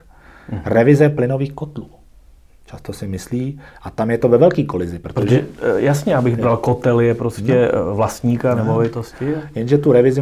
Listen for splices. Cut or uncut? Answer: uncut